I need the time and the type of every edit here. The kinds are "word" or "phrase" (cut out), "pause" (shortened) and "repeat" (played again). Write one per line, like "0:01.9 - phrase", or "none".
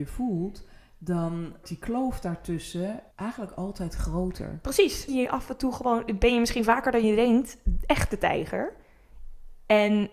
0:01.6 - word
0:03.1 - pause
0:05.1 - phrase